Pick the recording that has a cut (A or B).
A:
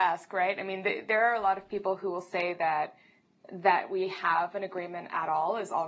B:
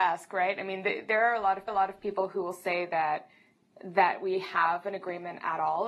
B